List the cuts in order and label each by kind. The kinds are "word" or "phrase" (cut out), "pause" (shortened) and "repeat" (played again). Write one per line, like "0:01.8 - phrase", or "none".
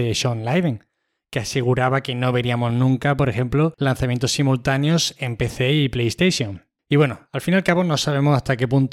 none